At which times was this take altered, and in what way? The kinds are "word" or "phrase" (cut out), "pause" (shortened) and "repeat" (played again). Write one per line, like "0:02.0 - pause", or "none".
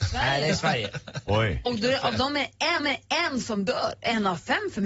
0:02.8 - repeat